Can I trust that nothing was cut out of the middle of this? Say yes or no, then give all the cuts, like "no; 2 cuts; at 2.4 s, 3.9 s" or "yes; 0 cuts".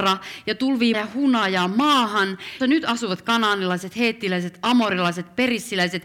no; 2 cuts; at 0.9 s, 2.6 s